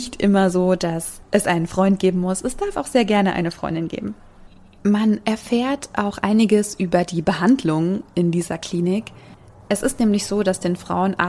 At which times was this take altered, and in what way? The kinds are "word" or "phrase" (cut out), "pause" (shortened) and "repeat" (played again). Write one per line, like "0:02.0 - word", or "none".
none